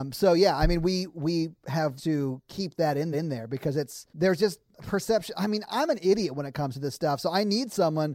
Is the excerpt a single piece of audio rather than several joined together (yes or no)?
no